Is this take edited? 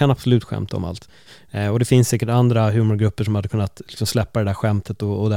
no; 0 cuts

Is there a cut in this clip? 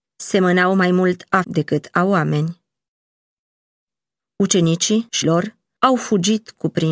yes; 2 cuts; at 1.4 s, 5.2 s

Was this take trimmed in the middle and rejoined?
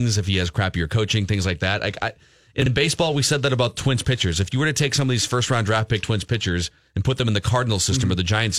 no; 0 cuts

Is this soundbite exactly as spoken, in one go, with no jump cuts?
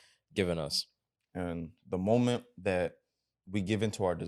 yes; 0 cuts

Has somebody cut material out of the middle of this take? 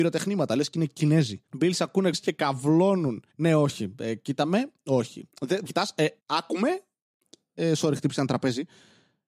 yes; 5 cuts; at 1.5 s, 2.1 s, 3.3 s, 5.7 s, 6.2 s

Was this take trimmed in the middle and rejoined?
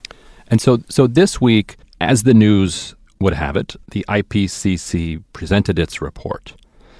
yes; 1 cut; at 3.8 s

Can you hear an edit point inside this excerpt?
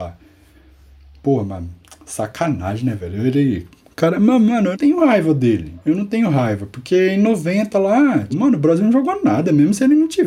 yes; 3 cuts; at 4.7 s, 5.8 s, 8.3 s

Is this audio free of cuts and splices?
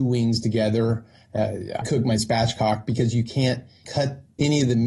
no; 2 cuts; at 1.8 s, 2.2 s

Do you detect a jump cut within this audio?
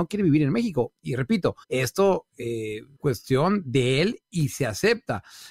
yes; 2 cuts; at 1.6 s, 3.0 s

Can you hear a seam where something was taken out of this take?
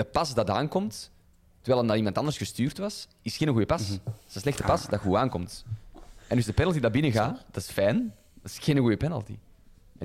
no; 0 cuts

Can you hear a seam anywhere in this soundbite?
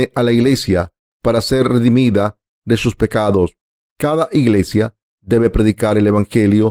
no; 0 cuts

